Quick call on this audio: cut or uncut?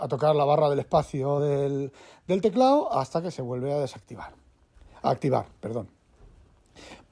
uncut